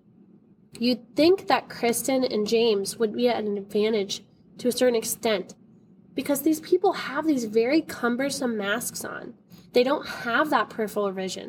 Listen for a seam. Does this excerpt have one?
no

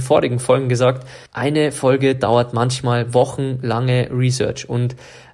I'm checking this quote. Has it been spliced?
yes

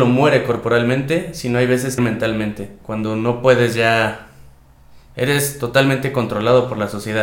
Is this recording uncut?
no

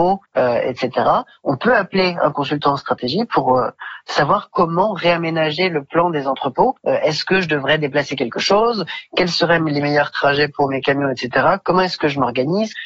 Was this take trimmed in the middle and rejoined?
no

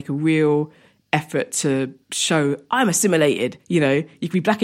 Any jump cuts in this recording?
yes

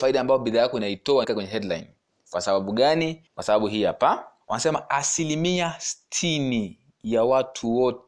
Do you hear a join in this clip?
yes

